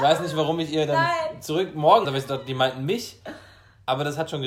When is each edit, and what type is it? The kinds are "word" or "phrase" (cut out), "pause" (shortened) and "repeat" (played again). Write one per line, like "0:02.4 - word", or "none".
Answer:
0:02.0 - word